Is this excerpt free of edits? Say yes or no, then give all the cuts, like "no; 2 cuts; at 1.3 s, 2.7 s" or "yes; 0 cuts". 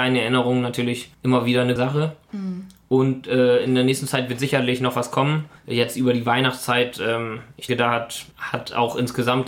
no; 5 cuts; at 1.1 s, 1.8 s, 5.6 s, 7.7 s, 8.3 s